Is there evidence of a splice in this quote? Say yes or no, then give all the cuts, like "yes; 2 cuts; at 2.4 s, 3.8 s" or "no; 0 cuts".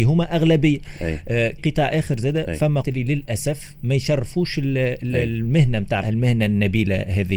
yes; 3 cuts; at 1.6 s, 2.8 s, 6.0 s